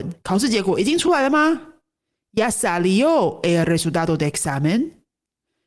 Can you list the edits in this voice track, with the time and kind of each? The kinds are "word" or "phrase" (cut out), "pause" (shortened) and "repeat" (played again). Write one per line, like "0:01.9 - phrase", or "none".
none